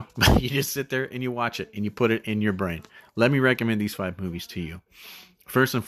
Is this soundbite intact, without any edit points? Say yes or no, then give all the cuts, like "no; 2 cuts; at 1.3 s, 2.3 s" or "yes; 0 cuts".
yes; 0 cuts